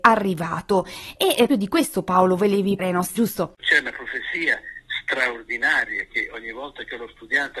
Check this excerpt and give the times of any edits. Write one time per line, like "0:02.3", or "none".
0:01.5
0:02.8
0:03.2